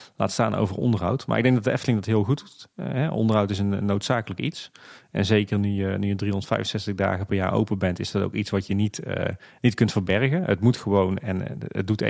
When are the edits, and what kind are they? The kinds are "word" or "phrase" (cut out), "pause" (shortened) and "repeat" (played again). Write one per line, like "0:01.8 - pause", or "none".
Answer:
none